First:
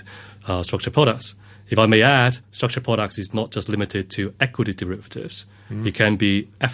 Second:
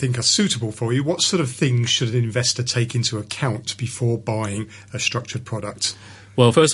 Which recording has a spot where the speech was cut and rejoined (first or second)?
first